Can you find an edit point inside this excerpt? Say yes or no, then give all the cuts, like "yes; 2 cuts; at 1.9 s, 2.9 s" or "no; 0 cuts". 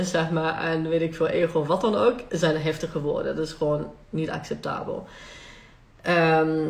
no; 0 cuts